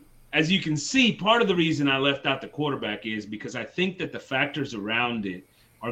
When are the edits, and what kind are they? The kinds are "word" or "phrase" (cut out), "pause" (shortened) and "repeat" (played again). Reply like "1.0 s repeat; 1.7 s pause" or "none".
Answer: none